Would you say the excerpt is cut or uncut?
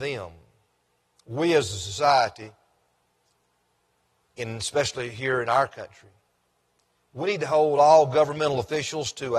uncut